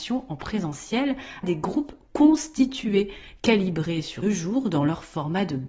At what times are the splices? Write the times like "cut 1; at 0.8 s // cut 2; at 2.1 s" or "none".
cut 1; at 1.4 s // cut 2; at 4.2 s

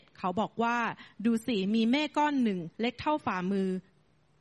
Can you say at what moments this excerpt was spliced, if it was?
cut 1; at 2.7 s

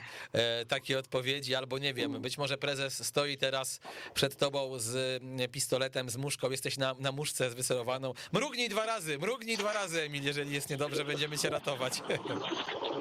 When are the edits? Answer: none

